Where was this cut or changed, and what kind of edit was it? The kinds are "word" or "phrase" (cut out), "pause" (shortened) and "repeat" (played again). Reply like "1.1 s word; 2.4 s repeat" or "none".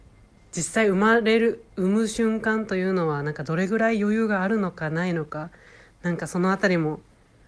none